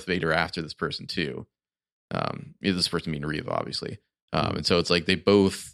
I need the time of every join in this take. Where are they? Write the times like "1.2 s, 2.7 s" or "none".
none

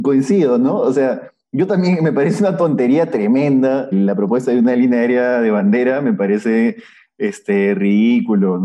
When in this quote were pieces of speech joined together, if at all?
3.9 s

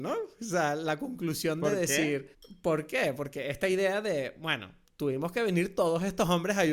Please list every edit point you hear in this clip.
2.3 s, 4.8 s

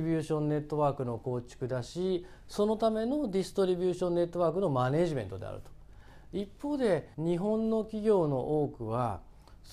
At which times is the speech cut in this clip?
7.1 s

